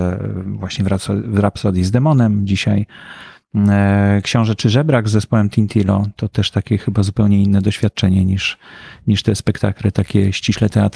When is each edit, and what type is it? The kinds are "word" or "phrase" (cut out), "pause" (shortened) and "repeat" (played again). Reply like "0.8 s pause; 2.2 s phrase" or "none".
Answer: none